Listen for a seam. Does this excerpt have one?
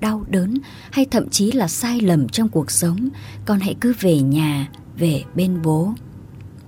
no; 0 cuts

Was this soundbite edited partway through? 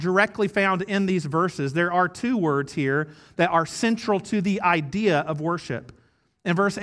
no; 0 cuts

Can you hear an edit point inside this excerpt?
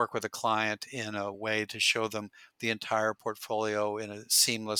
no; 0 cuts

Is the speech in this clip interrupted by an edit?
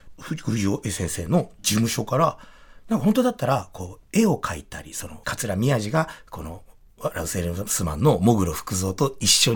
yes; 1 cut; at 5.2 s

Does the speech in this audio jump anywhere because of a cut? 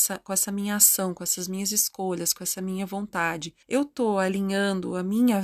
yes; 1 cut; at 3.6 s

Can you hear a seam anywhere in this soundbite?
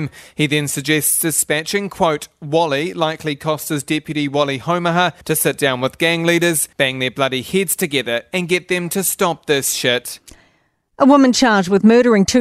yes; 2 cuts; at 5.2 s, 6.7 s

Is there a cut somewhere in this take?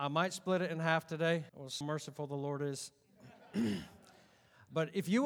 yes; 2 cuts; at 1.5 s, 1.8 s

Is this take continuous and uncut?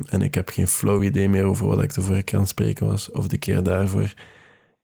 yes; 0 cuts

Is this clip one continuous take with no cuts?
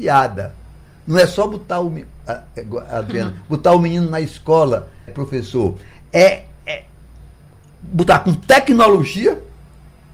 no; 1 cut; at 5.1 s

